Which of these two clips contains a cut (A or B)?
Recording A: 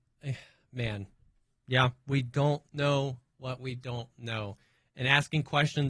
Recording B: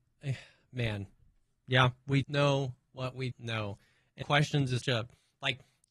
B